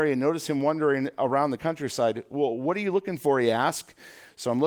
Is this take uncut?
yes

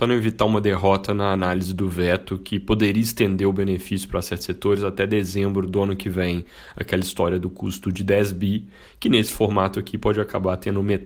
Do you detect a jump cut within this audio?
no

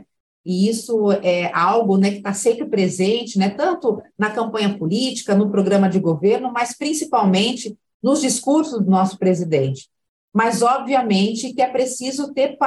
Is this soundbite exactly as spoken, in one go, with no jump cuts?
yes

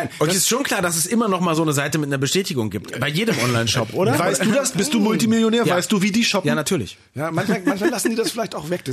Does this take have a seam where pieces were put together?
no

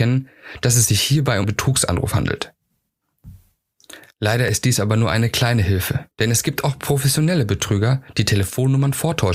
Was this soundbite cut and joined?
yes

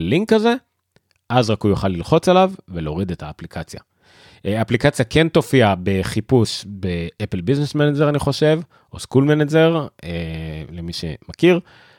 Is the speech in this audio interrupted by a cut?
no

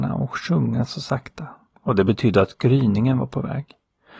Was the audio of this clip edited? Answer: no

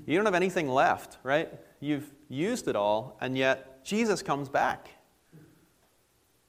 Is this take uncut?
yes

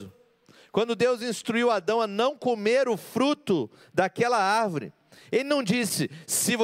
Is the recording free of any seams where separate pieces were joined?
yes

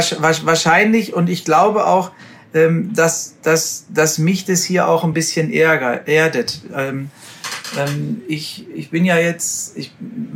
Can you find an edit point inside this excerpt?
no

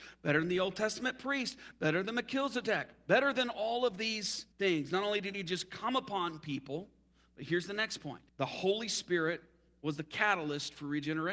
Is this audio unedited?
no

